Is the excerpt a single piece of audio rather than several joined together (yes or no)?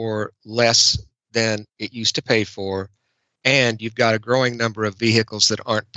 yes